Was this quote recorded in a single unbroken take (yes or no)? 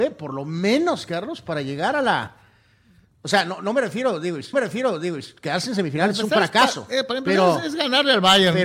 no